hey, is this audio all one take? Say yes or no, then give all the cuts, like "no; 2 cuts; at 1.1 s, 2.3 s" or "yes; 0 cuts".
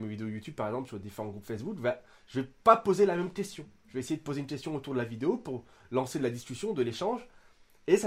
yes; 0 cuts